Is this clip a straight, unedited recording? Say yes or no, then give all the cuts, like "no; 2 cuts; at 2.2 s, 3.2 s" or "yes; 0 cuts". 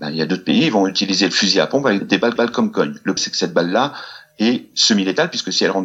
no; 3 cuts; at 2.0 s, 2.4 s, 3.2 s